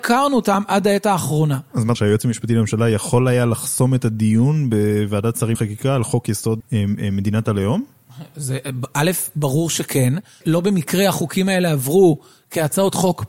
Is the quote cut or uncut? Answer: cut